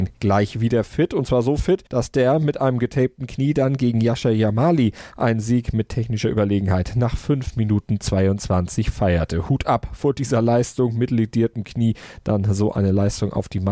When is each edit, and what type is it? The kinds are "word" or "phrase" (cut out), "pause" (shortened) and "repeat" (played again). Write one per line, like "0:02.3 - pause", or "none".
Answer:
0:01.9 - pause

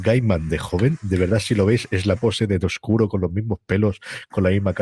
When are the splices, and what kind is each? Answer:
0:02.2 - word

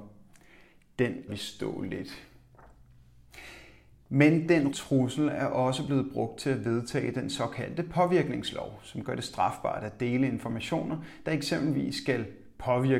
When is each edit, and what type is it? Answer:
0:01.3 - word
0:04.7 - word

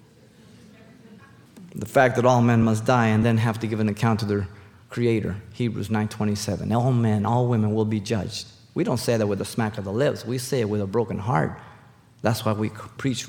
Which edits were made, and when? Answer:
none

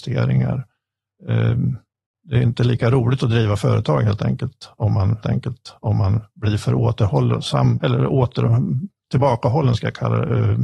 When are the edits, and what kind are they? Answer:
0:05.2 - repeat
0:07.7 - word

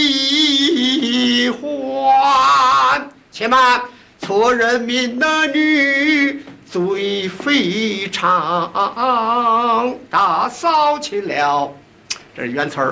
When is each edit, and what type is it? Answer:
none

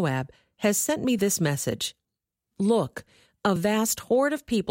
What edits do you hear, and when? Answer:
none

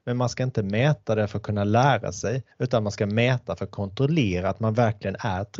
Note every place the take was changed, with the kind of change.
0:02.5 - pause

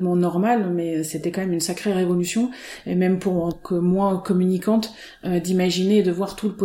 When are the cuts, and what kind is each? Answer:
0:03.5 - word

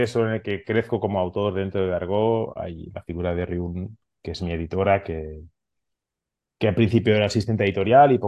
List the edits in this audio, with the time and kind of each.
none

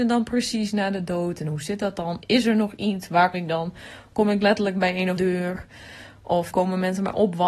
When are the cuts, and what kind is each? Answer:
0:03.3 - word
0:05.2 - word
0:06.5 - word

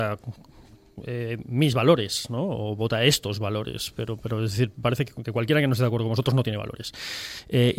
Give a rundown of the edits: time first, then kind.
none

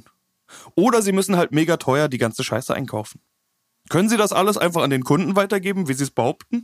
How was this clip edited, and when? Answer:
none

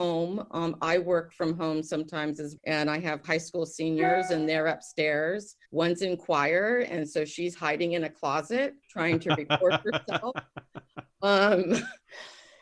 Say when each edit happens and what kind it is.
0:02.6 - word
0:03.2 - word
0:05.7 - pause
0:08.8 - pause

